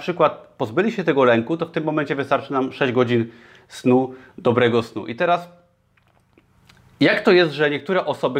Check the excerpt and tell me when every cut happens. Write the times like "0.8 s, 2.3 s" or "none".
none